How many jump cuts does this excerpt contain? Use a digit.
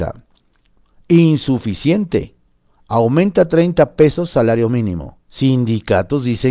1